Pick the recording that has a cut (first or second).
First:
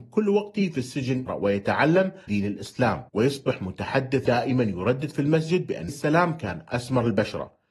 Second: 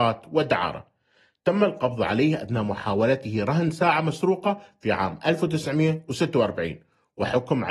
first